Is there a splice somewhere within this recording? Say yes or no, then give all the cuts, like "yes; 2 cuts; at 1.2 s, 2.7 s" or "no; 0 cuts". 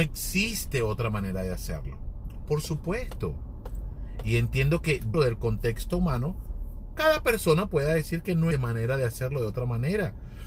yes; 2 cuts; at 5.1 s, 8.5 s